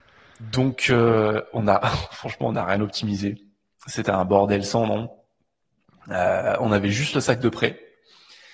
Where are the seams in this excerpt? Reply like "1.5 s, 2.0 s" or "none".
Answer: none